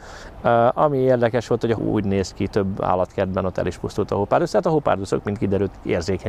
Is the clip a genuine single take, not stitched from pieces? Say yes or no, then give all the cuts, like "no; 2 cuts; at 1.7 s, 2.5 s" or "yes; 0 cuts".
no; 1 cut; at 1.8 s